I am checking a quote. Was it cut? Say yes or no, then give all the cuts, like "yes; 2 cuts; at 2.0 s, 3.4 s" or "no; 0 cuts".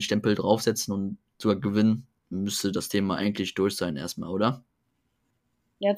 no; 0 cuts